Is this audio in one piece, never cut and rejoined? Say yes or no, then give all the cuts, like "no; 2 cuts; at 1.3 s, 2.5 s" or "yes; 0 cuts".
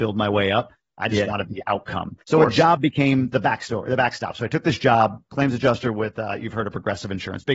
no; 1 cut; at 2.2 s